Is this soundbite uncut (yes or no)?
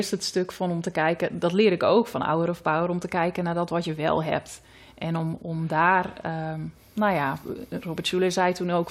yes